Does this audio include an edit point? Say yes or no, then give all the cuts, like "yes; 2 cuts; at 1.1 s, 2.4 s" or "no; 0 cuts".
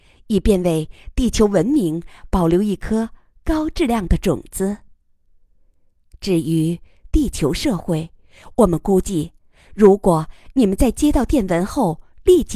no; 0 cuts